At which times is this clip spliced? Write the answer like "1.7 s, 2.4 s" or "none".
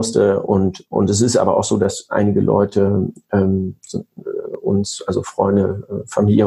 none